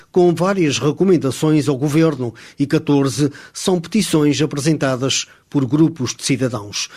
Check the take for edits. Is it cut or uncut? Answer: uncut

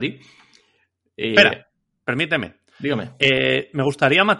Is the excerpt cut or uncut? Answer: uncut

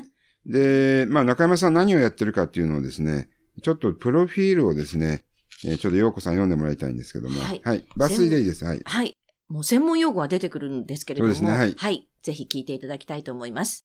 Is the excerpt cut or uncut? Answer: uncut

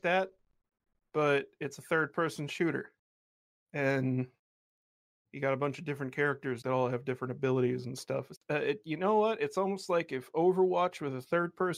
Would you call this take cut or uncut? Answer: cut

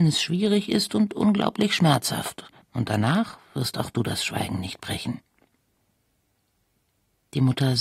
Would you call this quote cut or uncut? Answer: cut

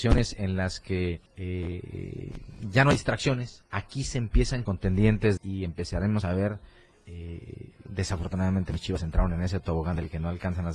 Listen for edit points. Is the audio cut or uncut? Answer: cut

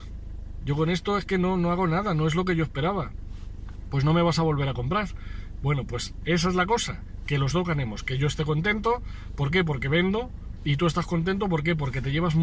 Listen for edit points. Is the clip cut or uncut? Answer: uncut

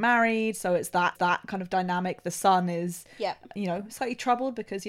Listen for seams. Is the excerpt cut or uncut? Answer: cut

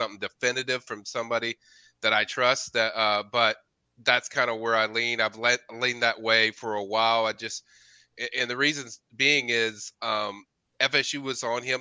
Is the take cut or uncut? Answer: uncut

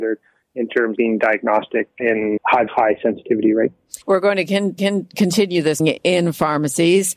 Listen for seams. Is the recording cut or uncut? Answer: cut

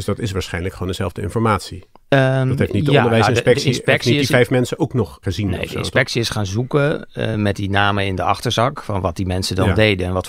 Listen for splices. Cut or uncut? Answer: cut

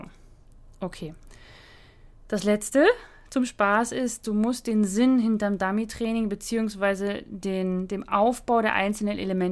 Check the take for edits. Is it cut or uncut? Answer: uncut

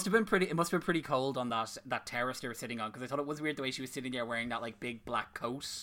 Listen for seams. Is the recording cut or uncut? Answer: uncut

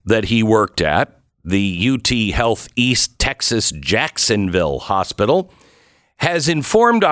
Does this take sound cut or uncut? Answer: uncut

